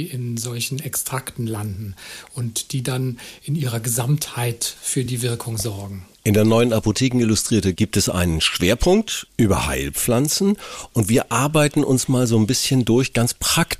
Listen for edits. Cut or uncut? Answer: uncut